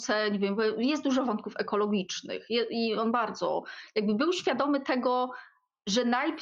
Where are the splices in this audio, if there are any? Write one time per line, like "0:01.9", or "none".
none